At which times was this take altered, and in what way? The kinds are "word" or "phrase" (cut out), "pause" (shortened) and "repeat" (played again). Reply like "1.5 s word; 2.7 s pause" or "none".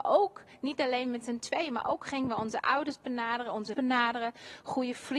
3.7 s word